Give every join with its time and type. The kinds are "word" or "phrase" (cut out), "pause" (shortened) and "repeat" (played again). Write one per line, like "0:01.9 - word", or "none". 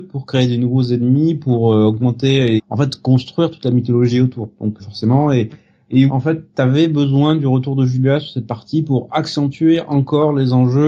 0:02.6 - word
0:04.8 - word
0:06.1 - word